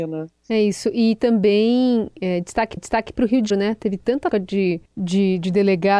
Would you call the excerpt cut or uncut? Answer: cut